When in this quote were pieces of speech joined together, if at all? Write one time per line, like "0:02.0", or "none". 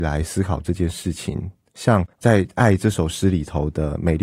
0:02.1